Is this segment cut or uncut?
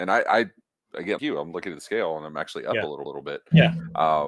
cut